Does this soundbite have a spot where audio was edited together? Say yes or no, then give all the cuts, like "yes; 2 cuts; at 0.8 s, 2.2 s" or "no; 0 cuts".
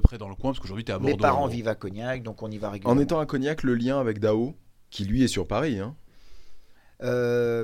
no; 0 cuts